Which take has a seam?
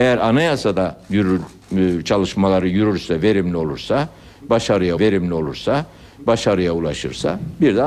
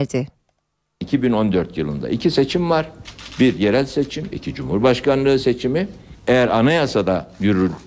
first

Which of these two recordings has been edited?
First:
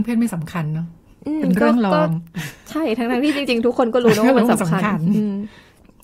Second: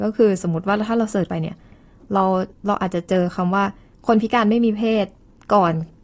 second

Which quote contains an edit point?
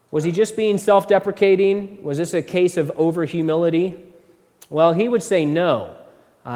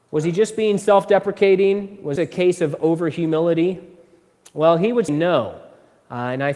second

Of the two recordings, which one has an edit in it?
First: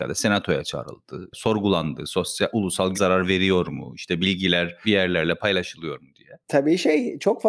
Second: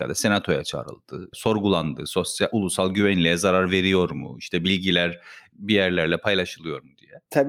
first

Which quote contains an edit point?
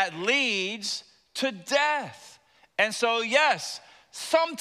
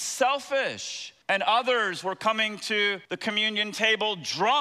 second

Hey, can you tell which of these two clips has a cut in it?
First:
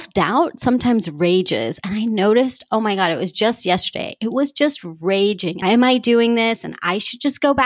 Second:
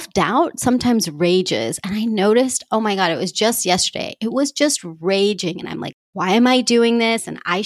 first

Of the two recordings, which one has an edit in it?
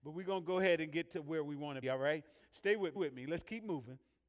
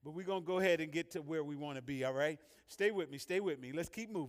first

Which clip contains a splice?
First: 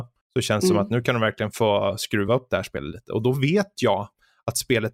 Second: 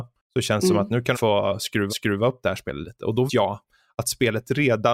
second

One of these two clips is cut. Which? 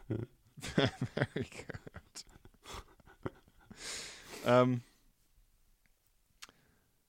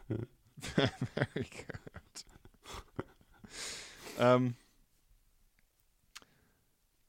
second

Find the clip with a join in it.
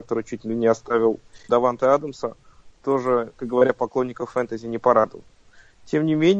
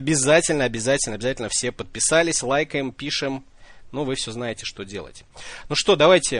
first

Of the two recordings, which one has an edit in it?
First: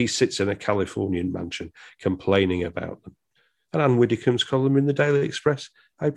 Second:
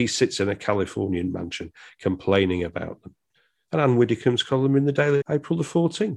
second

